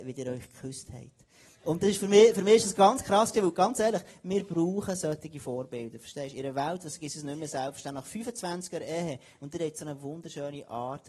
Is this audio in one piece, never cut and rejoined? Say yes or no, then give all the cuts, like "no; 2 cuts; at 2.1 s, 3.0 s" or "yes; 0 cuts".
yes; 0 cuts